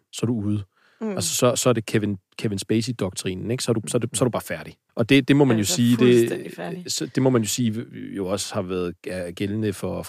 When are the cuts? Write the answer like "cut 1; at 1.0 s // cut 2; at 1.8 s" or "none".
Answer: cut 1; at 4.9 s